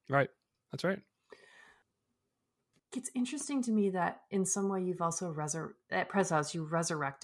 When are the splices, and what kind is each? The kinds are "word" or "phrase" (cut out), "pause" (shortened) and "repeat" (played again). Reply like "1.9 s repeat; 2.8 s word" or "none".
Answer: none